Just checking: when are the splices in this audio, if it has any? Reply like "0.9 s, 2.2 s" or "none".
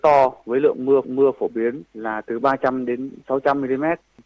1.0 s, 1.9 s